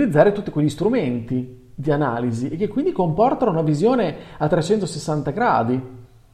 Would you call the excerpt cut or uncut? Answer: uncut